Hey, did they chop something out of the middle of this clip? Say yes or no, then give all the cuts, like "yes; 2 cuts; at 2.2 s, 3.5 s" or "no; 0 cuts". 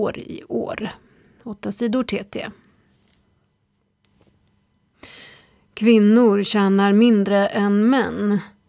no; 0 cuts